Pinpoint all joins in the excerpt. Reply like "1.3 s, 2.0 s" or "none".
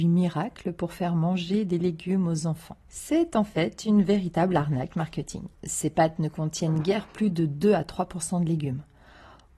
2.8 s, 5.5 s